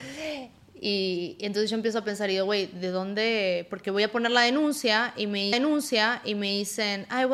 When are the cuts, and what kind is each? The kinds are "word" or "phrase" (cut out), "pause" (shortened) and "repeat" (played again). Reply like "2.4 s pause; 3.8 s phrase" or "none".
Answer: 5.5 s repeat